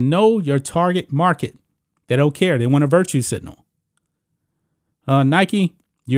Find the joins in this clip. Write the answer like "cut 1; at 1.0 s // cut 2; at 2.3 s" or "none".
none

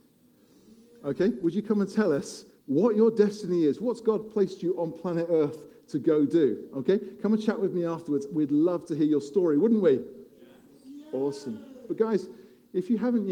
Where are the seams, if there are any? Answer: cut 1; at 2.6 s // cut 2; at 10.3 s

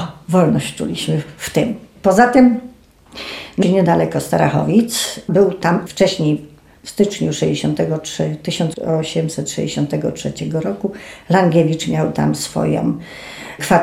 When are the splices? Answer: cut 1; at 3.6 s // cut 2; at 5.9 s

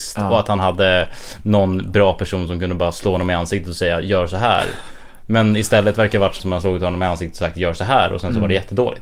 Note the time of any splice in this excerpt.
cut 1; at 6.4 s

